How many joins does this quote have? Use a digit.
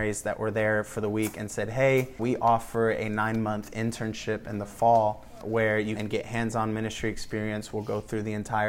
3